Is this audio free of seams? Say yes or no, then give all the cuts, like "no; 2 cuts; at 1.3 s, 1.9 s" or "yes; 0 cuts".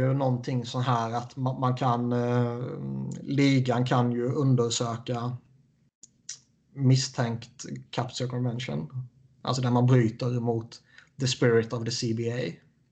yes; 0 cuts